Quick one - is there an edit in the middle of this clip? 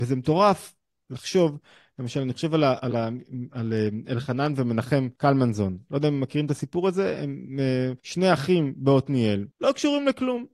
yes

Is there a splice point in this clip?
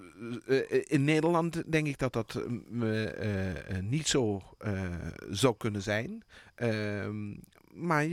no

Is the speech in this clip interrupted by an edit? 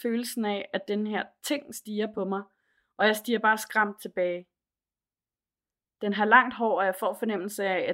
no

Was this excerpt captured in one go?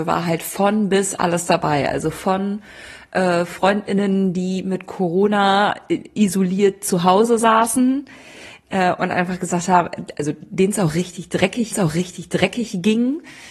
no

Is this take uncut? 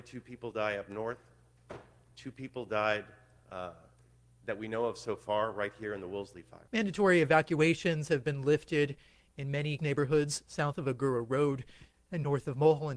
no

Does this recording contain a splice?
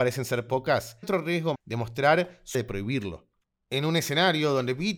yes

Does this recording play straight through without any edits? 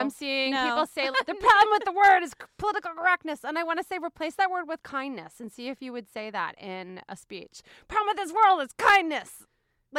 no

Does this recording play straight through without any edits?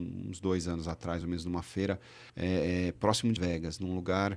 no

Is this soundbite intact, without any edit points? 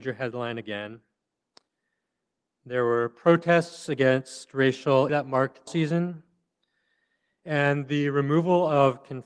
no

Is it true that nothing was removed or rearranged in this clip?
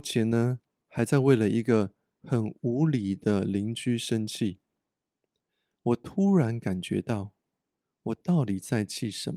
yes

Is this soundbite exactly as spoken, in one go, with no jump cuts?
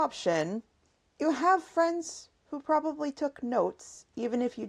yes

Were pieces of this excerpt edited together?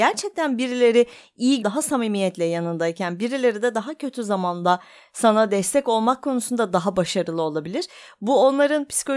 yes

